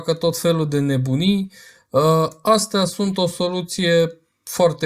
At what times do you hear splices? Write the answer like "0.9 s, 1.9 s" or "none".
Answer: none